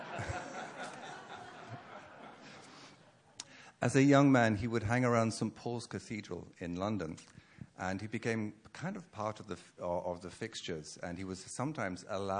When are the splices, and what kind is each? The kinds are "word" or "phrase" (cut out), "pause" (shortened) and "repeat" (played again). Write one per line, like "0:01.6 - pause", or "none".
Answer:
none

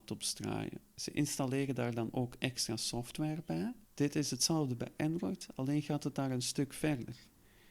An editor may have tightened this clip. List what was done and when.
0:03.8 - pause

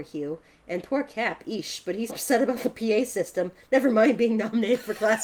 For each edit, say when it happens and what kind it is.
0:02.1 - word

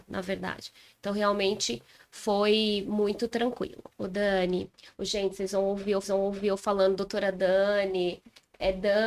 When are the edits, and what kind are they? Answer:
0:06.0 - repeat

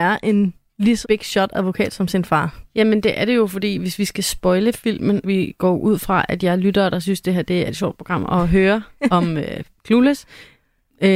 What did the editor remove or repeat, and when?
0:01.0 - word
0:05.2 - word
0:07.7 - word

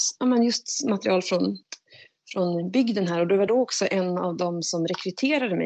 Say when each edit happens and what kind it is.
none

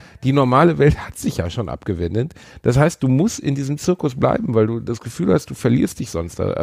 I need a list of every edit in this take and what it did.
none

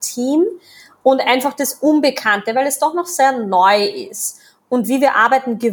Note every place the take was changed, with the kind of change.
none

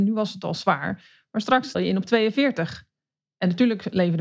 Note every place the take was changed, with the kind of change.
0:01.7 - word

